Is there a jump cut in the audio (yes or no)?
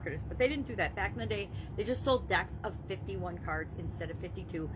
no